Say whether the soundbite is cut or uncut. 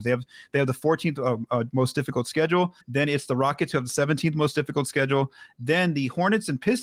cut